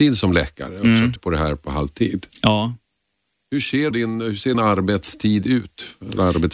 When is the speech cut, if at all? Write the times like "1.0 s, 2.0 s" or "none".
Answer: 1.2 s, 3.9 s, 4.5 s